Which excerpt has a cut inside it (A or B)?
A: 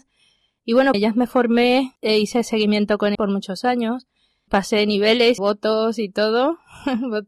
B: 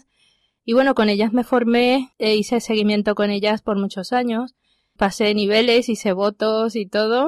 A